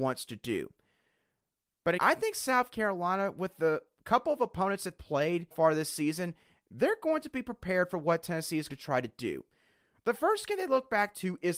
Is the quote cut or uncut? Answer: cut